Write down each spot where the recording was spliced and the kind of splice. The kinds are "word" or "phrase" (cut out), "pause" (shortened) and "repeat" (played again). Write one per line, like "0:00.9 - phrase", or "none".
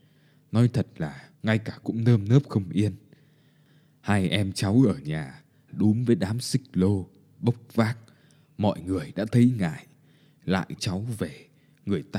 0:01.3 - pause
0:01.8 - word
0:05.7 - word
0:10.8 - word